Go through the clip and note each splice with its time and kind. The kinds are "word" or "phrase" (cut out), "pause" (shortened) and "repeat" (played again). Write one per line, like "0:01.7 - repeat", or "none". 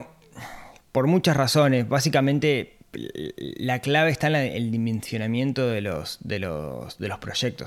0:02.8 - pause

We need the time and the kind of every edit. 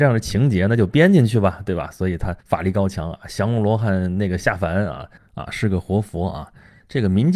0:02.4 - pause
0:05.2 - pause

